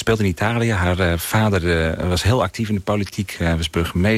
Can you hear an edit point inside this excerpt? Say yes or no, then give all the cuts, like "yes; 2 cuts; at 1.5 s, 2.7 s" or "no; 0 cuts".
no; 0 cuts